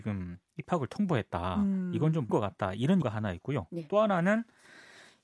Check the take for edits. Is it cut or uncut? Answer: cut